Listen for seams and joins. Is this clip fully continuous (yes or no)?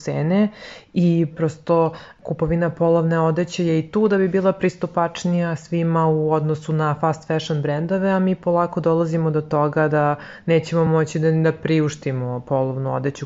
yes